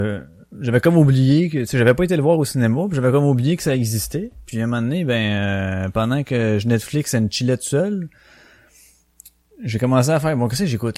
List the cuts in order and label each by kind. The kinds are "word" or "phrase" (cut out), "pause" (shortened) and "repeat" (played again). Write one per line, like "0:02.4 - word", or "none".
none